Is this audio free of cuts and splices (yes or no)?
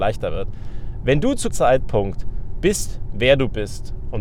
no